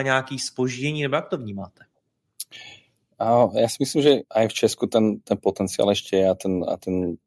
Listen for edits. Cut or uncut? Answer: cut